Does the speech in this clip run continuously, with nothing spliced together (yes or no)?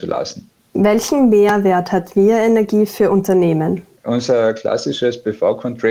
yes